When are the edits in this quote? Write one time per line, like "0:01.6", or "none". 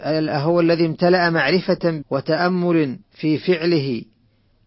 0:02.0
0:03.0